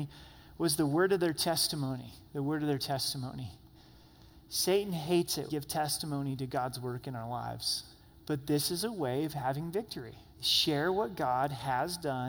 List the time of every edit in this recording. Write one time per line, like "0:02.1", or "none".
0:04.4
0:05.5
0:08.0
0:10.3